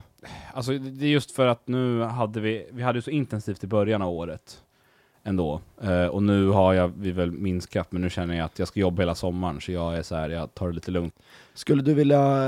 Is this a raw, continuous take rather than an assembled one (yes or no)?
yes